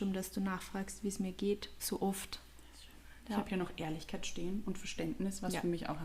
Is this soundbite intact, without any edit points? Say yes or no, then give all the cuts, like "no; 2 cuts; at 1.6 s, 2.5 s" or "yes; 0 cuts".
yes; 0 cuts